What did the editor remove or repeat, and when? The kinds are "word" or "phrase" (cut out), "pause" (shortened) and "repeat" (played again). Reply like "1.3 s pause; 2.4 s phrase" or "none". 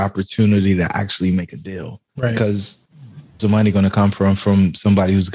3.4 s word